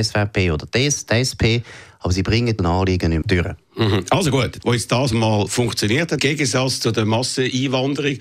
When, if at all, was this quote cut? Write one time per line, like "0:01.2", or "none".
0:02.6
0:03.2
0:04.6
0:06.2